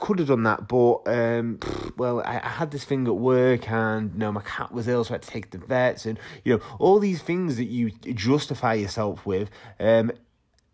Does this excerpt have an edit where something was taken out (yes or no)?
no